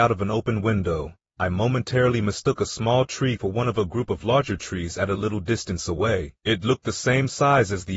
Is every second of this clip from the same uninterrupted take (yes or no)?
no